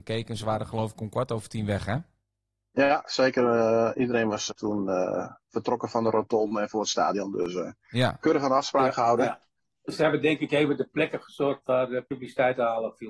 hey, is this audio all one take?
no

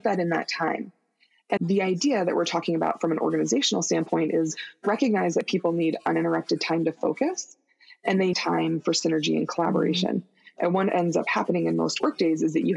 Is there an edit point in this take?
yes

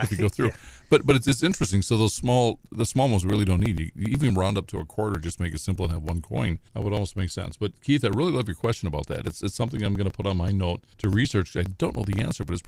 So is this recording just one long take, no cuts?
no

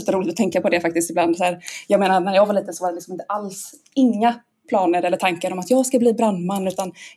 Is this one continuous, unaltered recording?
yes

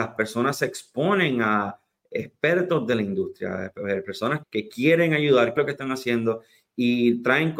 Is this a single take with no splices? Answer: no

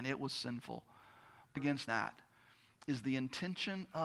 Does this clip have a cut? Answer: yes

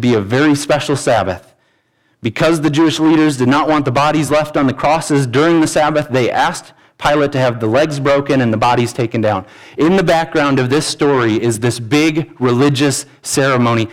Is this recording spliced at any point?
no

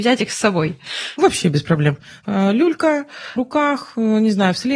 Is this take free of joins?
no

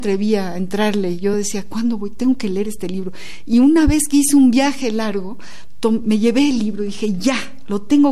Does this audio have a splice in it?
no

